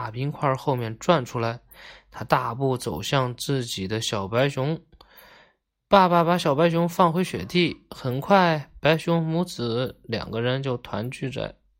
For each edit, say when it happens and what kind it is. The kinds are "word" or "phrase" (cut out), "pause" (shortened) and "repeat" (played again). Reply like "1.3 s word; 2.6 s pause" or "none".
none